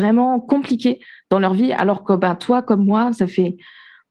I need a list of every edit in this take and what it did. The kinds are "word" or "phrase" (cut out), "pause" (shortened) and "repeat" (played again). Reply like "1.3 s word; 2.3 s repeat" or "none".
none